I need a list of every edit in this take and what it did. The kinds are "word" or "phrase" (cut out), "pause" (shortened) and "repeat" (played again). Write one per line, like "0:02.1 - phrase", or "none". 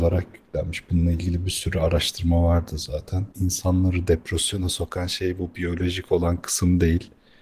0:03.3 - pause